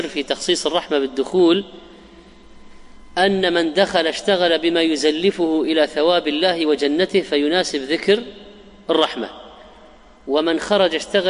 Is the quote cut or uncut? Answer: uncut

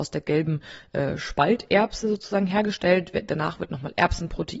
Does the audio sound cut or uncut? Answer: uncut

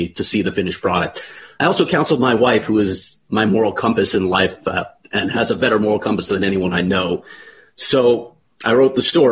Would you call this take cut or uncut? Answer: uncut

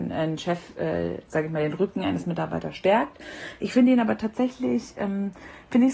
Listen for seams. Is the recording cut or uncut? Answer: uncut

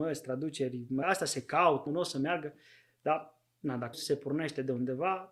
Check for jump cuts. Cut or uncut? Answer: cut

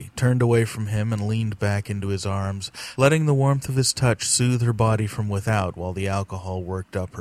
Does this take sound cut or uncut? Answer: uncut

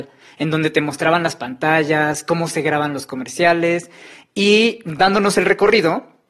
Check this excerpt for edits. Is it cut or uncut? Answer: uncut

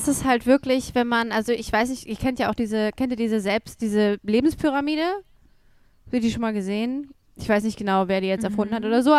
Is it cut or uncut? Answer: uncut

